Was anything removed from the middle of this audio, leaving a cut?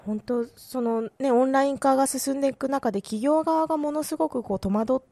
yes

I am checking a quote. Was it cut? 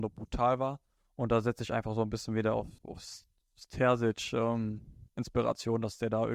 yes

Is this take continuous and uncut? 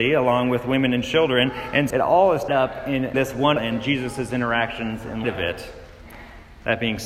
no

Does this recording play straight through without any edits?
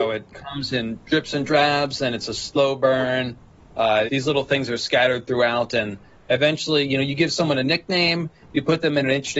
no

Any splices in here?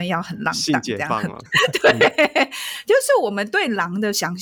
yes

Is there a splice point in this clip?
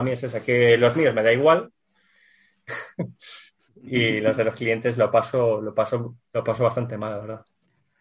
no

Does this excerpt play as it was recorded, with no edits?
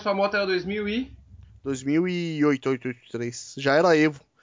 yes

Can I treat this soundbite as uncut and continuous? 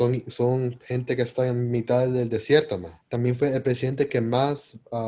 no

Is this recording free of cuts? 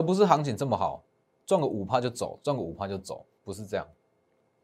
yes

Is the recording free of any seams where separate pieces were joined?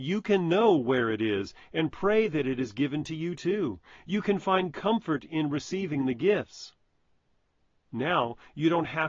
yes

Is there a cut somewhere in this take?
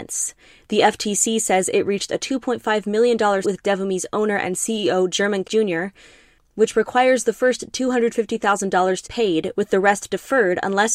yes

